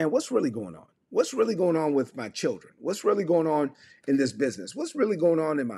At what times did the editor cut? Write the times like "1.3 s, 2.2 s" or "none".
none